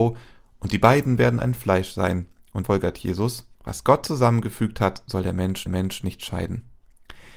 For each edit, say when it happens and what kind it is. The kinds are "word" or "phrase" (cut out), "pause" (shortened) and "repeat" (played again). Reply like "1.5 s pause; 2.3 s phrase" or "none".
2.6 s word; 3.5 s pause; 5.7 s repeat